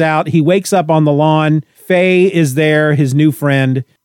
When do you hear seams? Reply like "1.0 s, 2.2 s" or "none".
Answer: none